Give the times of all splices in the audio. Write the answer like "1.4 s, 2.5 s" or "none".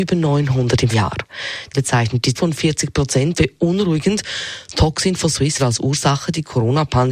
0.9 s, 1.7 s, 2.3 s, 3.4 s, 5.6 s